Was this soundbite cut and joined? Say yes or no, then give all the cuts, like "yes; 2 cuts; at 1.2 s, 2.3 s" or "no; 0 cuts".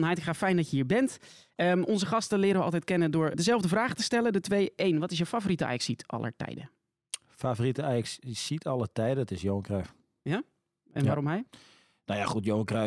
yes; 1 cut; at 3.3 s